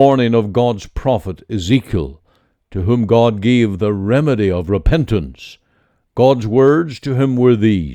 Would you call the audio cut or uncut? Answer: uncut